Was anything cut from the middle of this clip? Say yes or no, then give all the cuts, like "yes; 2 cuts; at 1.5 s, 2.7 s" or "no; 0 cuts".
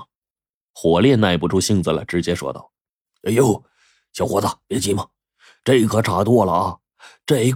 no; 0 cuts